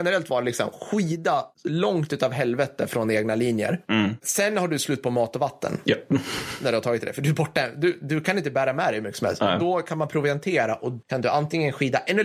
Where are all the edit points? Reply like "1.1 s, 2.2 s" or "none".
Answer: 11.0 s